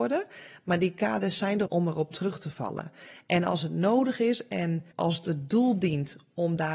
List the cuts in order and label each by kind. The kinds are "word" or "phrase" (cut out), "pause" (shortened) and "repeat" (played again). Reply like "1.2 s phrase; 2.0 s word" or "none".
1.7 s word; 4.9 s pause